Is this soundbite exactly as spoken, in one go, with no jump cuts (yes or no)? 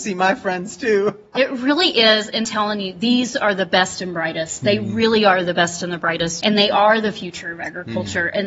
no